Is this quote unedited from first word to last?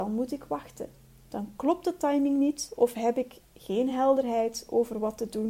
yes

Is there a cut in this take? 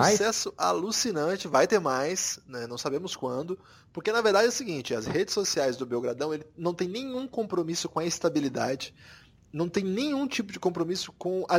no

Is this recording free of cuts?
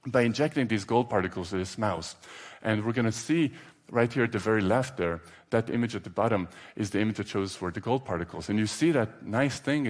yes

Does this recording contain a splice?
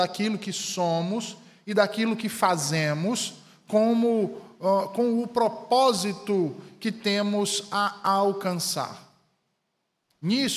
no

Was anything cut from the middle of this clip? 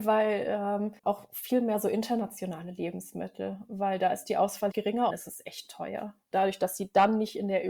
yes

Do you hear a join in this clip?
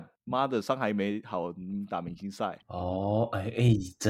yes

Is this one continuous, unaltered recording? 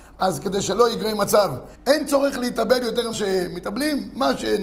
no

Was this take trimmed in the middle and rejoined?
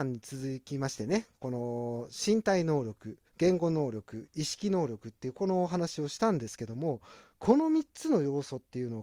yes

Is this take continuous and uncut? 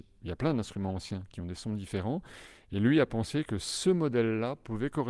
yes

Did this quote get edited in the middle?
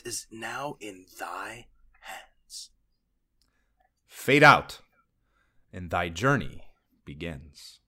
no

